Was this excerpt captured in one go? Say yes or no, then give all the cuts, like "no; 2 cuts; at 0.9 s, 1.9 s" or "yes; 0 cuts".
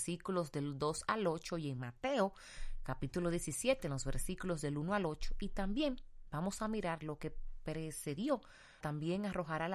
no; 1 cut; at 8.8 s